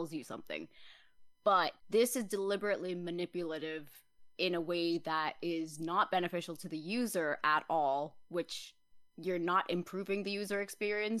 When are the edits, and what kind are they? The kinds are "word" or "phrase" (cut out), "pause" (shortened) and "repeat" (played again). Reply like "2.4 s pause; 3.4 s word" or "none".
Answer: 1.8 s pause